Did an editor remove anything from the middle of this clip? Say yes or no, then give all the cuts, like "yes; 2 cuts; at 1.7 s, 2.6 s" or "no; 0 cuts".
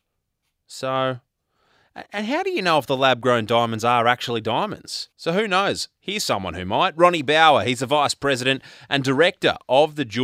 yes; 1 cut; at 5.1 s